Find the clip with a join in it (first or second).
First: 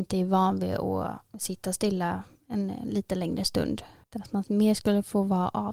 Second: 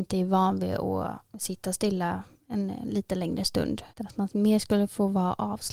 second